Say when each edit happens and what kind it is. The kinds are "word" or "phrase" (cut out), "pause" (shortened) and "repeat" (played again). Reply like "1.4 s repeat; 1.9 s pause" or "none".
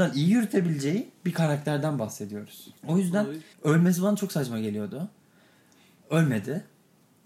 2.8 s pause; 3.5 s pause